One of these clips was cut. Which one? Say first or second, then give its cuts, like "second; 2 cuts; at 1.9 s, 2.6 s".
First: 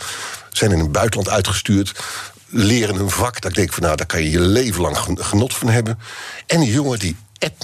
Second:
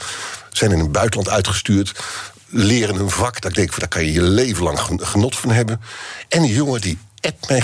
second; 1 cut; at 3.8 s